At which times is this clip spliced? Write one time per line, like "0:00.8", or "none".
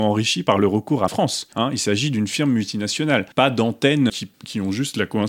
0:01.1
0:01.5
0:03.3
0:04.1